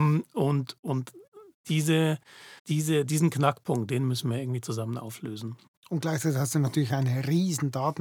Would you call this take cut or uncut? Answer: cut